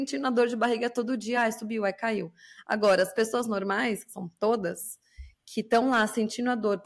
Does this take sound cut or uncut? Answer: uncut